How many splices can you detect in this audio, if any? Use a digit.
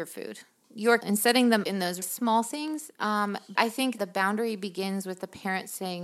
5